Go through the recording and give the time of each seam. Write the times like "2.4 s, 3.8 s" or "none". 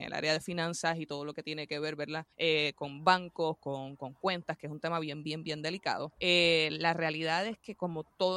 2.3 s, 6.2 s